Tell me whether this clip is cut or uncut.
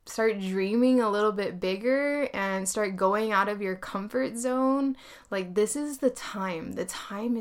uncut